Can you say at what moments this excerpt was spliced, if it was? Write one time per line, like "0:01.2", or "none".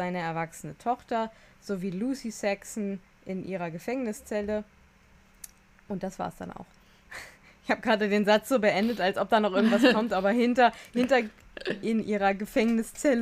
none